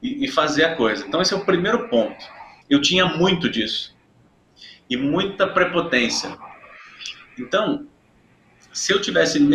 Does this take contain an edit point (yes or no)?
no